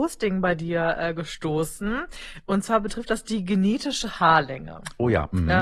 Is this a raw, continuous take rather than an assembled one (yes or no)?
yes